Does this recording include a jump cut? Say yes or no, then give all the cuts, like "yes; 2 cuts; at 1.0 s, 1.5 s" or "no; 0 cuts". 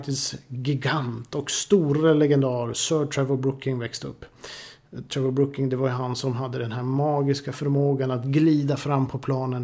no; 0 cuts